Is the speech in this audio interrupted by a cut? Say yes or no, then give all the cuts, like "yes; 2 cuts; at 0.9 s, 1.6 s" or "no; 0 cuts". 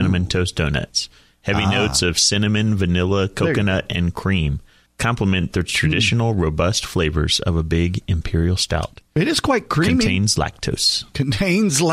yes; 1 cut; at 4.9 s